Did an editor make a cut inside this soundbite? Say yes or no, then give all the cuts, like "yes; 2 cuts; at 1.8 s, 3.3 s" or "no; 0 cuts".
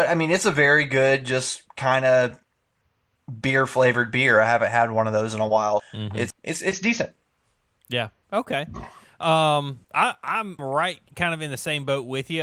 yes; 6 cuts; at 1.7 s, 5.8 s, 6.3 s, 9.8 s, 10.6 s, 11.1 s